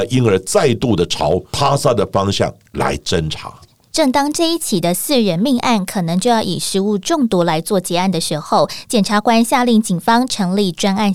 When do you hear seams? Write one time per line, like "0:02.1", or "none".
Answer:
none